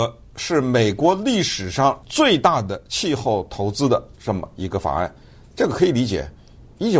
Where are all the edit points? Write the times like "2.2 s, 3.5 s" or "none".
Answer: 2.0 s

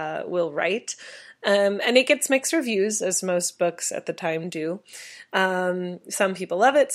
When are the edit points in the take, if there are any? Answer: none

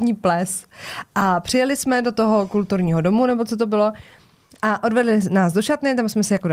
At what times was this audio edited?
none

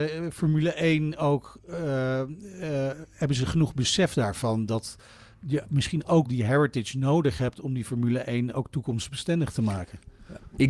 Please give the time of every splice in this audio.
6.3 s

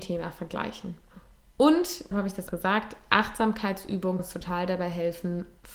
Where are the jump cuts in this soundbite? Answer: 2.1 s, 2.5 s, 4.2 s

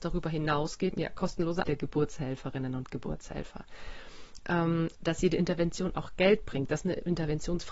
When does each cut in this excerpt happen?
0.9 s, 1.6 s

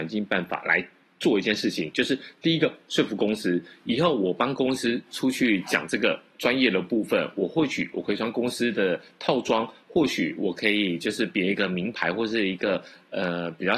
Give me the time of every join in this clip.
none

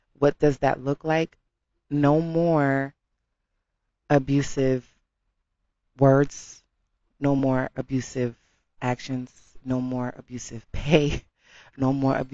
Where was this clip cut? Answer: none

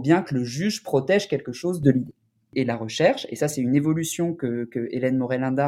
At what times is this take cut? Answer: none

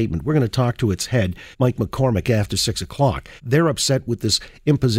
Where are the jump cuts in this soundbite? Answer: 1.5 s, 3.4 s

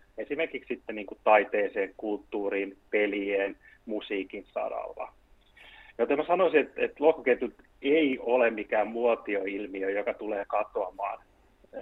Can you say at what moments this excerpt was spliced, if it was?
none

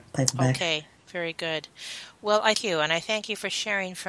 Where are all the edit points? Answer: 2.5 s

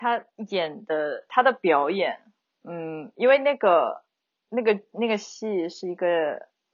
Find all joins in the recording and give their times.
1.3 s

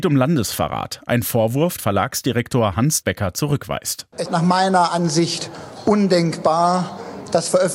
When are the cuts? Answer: 1.8 s, 3.0 s, 4.3 s

